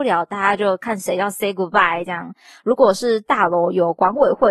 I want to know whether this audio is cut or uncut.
uncut